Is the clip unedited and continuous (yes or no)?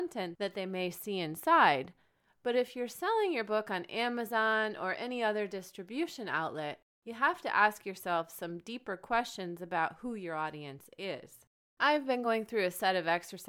yes